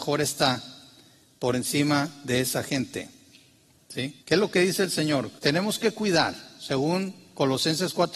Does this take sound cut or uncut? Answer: cut